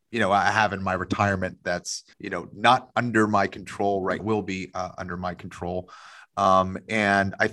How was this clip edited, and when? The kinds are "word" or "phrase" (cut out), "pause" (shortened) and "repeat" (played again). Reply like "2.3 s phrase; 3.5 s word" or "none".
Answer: 2.1 s pause; 4.2 s phrase

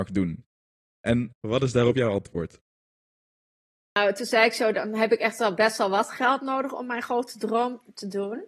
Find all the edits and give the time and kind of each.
none

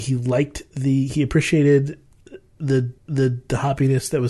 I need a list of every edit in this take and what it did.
3.0 s repeat

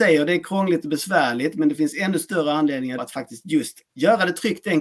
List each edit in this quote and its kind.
3.0 s word; 3.8 s pause

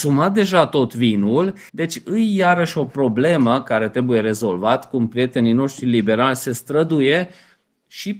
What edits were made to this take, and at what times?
1.7 s pause

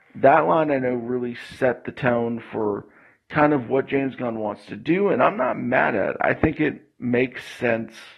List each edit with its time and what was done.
none

